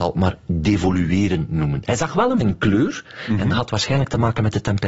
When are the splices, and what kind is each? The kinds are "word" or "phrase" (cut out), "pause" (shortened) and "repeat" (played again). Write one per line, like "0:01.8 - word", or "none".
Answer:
0:02.4 - word

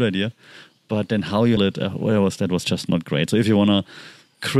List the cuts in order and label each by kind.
0:01.6 - word

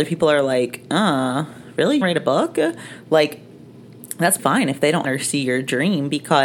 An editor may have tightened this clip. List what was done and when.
0:02.0 - word
0:04.4 - word
0:05.0 - word

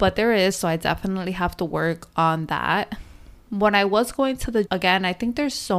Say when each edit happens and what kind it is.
0:04.7 - word

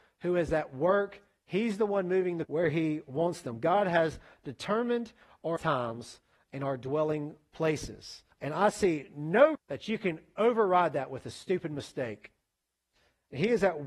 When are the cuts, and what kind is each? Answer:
0:02.5 - word
0:05.6 - word
0:08.3 - pause
0:09.5 - word

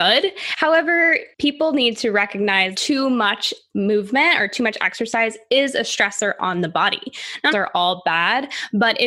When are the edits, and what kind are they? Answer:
0:01.3 - pause
0:02.7 - word
0:07.5 - phrase

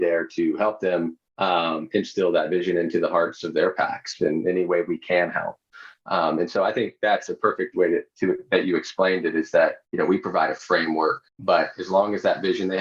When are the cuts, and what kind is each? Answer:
0:01.3 - pause
0:09.8 - pause
0:11.3 - pause

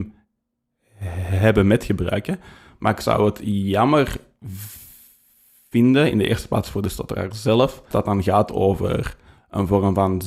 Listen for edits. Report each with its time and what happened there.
0:07.9 - word

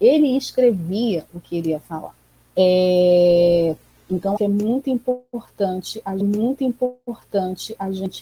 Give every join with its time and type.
0:02.3 - pause
0:04.4 - word
0:06.2 - repeat

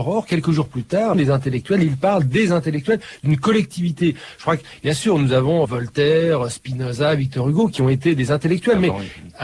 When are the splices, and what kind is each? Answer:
0:01.1 - phrase
0:05.6 - word

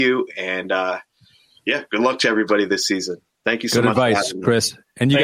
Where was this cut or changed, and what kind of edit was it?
none

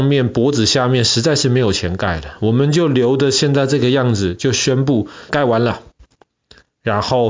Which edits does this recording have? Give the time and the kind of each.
0:05.3 - word

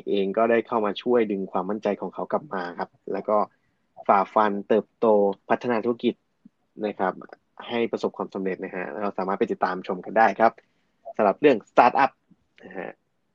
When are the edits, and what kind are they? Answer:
0:05.4 - pause

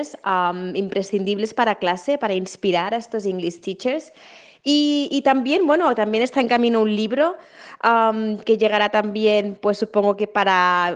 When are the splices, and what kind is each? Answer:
none

